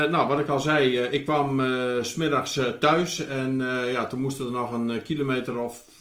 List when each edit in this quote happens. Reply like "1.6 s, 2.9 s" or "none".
none